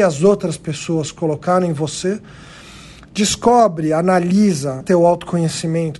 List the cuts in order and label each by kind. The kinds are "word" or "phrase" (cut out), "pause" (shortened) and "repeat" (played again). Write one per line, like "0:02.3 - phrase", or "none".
0:04.8 - word